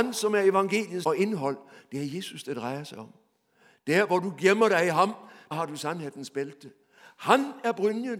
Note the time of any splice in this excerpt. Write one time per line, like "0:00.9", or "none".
0:01.0
0:05.5